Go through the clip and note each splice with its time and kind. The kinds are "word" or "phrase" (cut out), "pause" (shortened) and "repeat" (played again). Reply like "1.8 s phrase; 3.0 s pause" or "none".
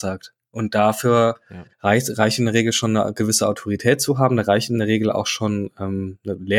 1.7 s pause

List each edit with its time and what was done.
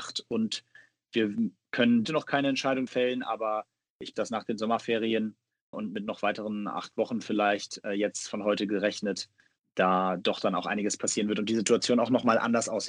2.0 s phrase; 2.9 s word; 4.1 s phrase; 5.7 s word; 9.6 s word

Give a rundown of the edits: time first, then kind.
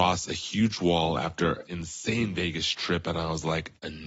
1.7 s word

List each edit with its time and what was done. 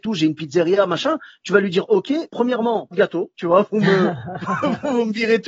2.3 s word; 2.9 s word; 3.3 s word

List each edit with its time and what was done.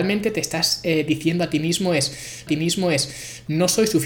2.5 s repeat

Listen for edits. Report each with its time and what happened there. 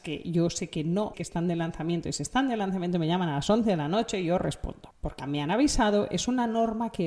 1.1 s phrase; 5.2 s word

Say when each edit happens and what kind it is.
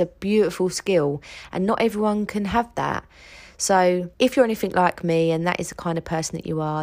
4.1 s pause

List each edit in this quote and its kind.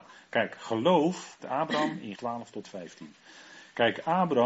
1.4 s word; 2.2 s word; 2.6 s word

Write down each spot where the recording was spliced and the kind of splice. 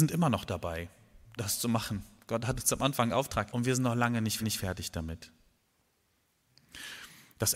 1.4 s word; 3.5 s word; 4.4 s repeat

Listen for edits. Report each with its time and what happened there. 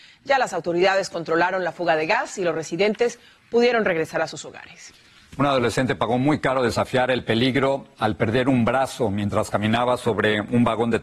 none

